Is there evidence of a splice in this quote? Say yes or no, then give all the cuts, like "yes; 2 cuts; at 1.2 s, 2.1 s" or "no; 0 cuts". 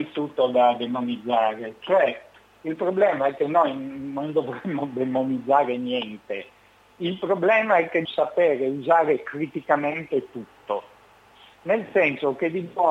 yes; 1 cut; at 8.0 s